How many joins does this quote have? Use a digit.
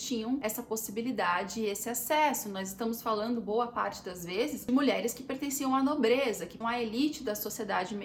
1